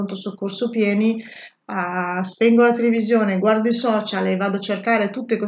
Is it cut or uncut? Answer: uncut